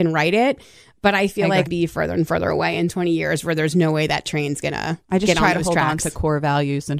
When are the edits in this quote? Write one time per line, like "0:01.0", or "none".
0:01.7
0:05.0